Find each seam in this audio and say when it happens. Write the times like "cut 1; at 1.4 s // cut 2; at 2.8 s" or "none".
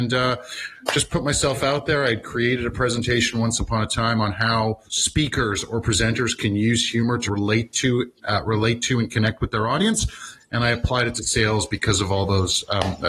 cut 1; at 4.9 s // cut 2; at 7.3 s

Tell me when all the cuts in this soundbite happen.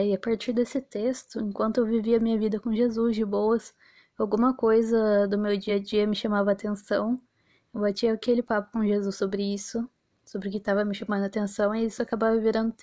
none

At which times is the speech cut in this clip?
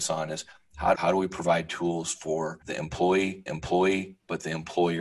cut 1; at 0.9 s // cut 2; at 2.6 s // cut 3; at 3.5 s

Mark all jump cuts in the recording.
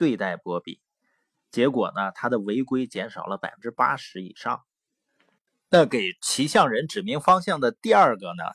none

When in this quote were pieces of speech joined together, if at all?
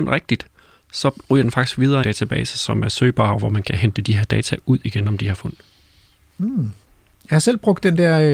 cut 1; at 2.0 s // cut 2; at 5.3 s

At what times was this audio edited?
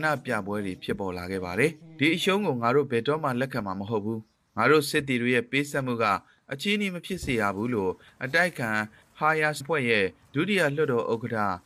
cut 1; at 9.6 s

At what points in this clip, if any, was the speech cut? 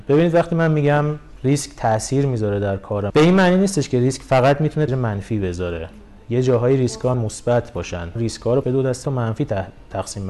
cut 1; at 3.1 s // cut 2; at 4.9 s // cut 3; at 7.1 s // cut 4; at 8.2 s // cut 5; at 8.6 s // cut 6; at 9.0 s

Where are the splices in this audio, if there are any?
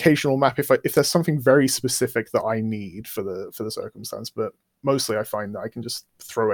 none

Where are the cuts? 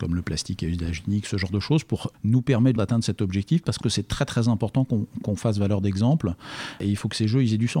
cut 1; at 2.1 s // cut 2; at 2.8 s // cut 3; at 3.8 s // cut 4; at 5.2 s

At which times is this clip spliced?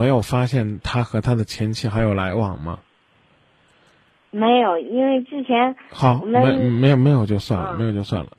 none

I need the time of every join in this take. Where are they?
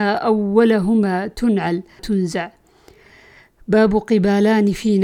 cut 1; at 2.0 s

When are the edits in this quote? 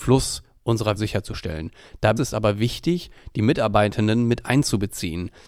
cut 1; at 1.0 s // cut 2; at 2.2 s

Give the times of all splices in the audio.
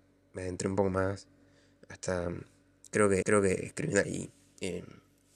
cut 1; at 3.2 s // cut 2; at 4.0 s

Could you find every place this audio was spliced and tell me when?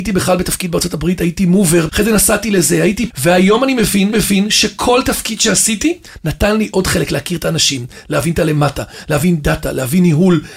cut 1; at 1.9 s // cut 2; at 3.1 s // cut 3; at 4.1 s

